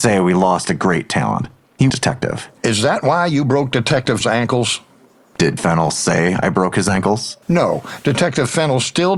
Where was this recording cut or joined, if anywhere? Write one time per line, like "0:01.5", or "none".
0:01.9
0:04.2
0:05.6
0:07.4